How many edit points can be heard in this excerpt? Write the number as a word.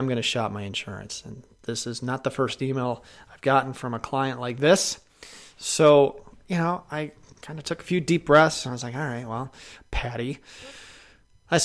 zero